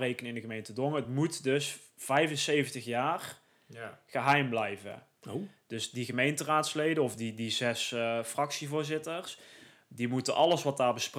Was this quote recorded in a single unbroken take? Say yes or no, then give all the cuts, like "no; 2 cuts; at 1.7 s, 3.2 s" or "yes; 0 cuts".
yes; 0 cuts